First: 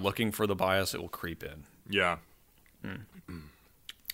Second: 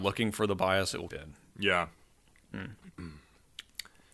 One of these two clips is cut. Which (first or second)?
second